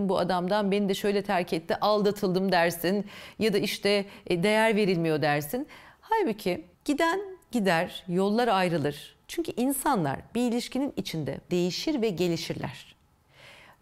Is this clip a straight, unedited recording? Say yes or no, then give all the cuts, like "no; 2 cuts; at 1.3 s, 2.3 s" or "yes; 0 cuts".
no; 2 cuts; at 6.7 s, 11.5 s